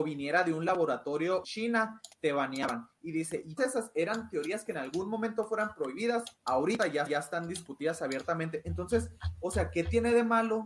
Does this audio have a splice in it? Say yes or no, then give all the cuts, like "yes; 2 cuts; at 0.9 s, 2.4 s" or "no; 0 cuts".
yes; 4 cuts; at 1.4 s, 3.6 s, 6.4 s, 7.1 s